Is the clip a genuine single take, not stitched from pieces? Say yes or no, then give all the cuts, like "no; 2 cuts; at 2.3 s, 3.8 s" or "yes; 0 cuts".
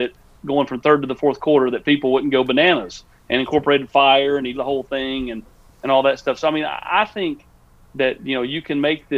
no; 1 cut; at 4.5 s